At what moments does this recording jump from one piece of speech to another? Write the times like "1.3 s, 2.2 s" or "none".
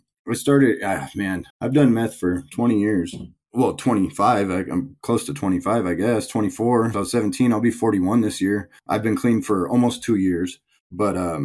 1.5 s, 6.9 s, 8.8 s